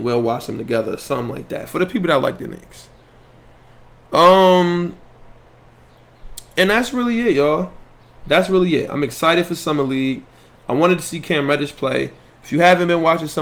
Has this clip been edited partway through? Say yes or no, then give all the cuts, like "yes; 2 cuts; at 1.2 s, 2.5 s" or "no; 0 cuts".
no; 0 cuts